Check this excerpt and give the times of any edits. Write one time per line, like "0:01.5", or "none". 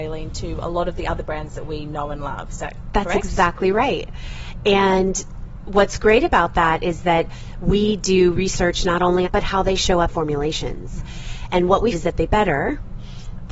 0:09.2
0:10.1
0:11.9
0:12.3